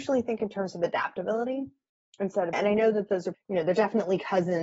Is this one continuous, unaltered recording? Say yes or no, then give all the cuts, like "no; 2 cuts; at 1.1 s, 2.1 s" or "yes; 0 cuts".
no; 2 cuts; at 2.5 s, 3.3 s